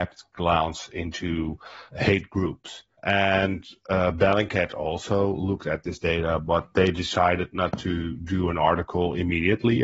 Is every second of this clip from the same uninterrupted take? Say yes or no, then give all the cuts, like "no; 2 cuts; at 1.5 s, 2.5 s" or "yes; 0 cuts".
no; 2 cuts; at 1.9 s, 2.9 s